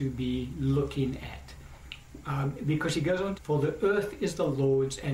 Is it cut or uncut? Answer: cut